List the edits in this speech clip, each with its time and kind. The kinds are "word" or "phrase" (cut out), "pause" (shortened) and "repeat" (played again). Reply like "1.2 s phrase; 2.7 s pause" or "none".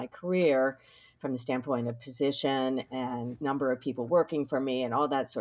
none